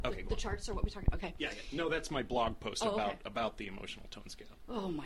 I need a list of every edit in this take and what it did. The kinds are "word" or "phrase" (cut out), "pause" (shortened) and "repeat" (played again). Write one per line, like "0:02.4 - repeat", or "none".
none